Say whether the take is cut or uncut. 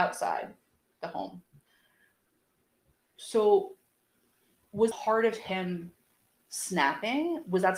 cut